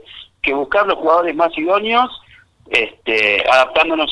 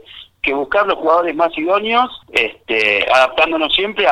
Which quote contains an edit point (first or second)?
second